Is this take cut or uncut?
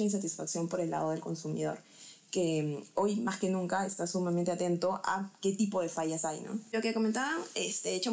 uncut